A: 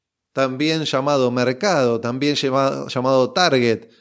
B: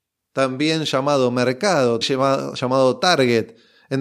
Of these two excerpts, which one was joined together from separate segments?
B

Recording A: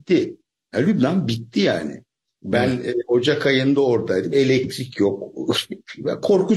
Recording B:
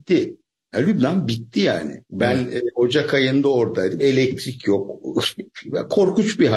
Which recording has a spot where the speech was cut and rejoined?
B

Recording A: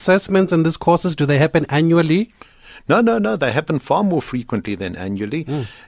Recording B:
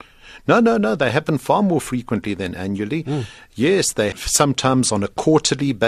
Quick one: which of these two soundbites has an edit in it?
B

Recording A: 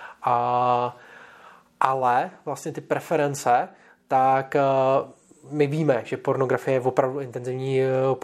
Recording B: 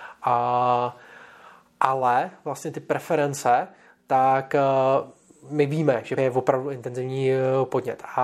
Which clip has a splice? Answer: B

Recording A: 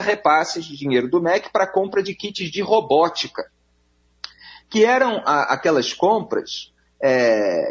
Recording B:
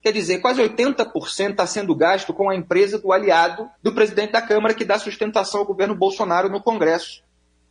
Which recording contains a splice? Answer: B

